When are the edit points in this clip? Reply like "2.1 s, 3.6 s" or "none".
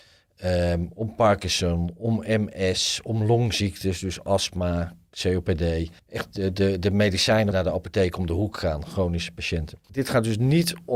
6.0 s, 7.5 s, 9.8 s